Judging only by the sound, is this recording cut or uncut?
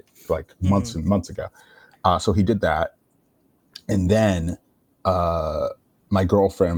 uncut